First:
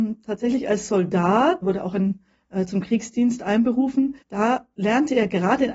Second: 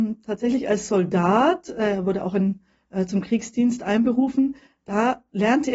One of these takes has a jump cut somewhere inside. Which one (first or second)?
first